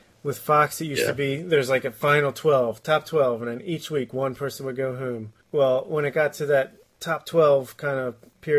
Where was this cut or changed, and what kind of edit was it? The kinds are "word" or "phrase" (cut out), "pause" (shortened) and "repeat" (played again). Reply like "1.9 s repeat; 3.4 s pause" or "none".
5.4 s pause

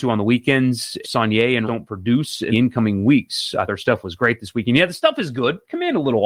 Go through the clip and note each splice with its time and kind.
1.0 s word; 1.6 s word; 2.5 s word; 3.7 s word

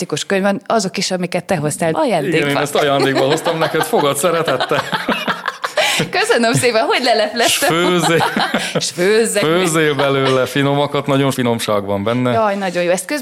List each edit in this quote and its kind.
1.9 s word; 11.3 s word

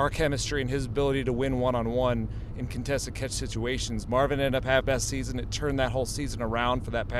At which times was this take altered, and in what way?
4.8 s word

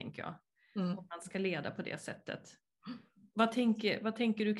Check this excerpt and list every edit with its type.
none

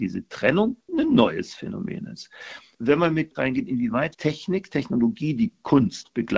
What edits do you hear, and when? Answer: 3.3 s phrase; 4.1 s word

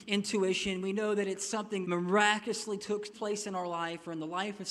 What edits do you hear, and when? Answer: 1.8 s word; 3.1 s word

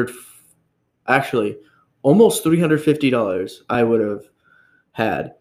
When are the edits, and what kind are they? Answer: none

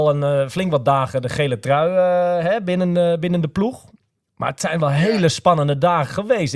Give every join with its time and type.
none

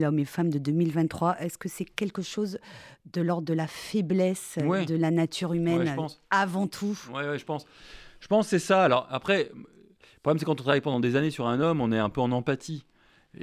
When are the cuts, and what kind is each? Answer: none

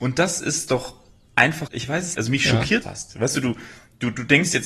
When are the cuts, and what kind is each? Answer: 1.7 s word; 2.1 s word; 2.8 s word

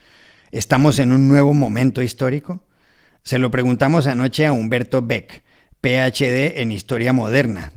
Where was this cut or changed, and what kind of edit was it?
none

